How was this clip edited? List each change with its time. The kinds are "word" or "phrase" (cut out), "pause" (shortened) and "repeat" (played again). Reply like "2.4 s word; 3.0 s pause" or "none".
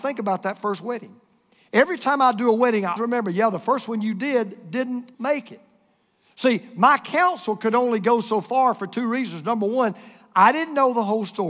3.0 s word; 5.1 s pause